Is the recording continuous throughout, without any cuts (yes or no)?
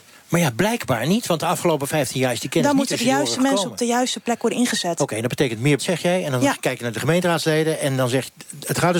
no